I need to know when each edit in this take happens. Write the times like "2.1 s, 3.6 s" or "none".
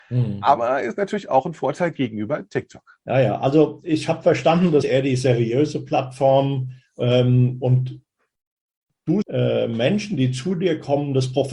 3.0 s, 4.8 s, 9.2 s

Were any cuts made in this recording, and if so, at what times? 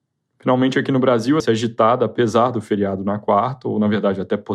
1.4 s

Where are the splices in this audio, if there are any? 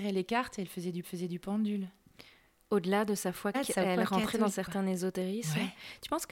1.0 s, 3.5 s, 4.5 s

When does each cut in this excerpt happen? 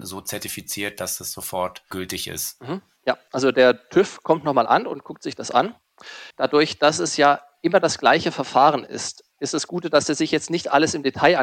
6.3 s

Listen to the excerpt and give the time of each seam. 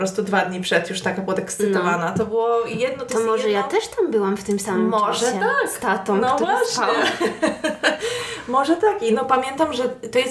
none

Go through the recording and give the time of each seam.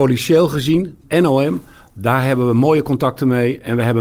1.0 s

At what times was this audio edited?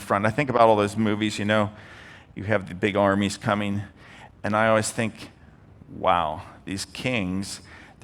none

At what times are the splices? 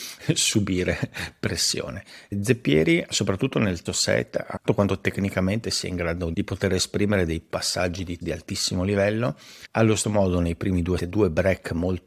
3.9 s, 4.7 s, 5.6 s, 6.3 s, 8.2 s, 10.0 s, 11.0 s

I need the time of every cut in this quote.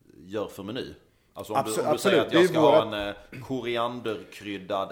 none

